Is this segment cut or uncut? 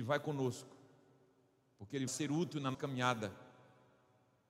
cut